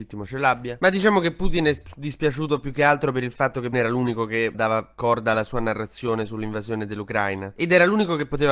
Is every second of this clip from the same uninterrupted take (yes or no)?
no